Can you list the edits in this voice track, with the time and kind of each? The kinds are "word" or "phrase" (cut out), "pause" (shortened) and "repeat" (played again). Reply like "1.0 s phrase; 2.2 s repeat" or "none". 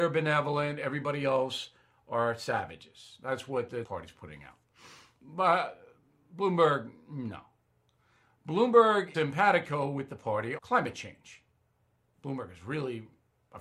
3.8 s word; 9.1 s word; 10.6 s word